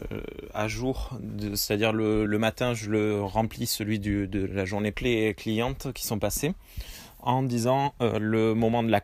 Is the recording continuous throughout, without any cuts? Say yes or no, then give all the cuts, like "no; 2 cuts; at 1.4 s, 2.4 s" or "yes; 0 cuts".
no; 2 cuts; at 2.3 s, 4.9 s